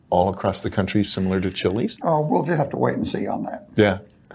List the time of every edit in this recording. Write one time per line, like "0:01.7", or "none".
none